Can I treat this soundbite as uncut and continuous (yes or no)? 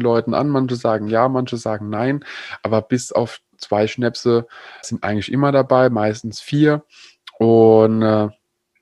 no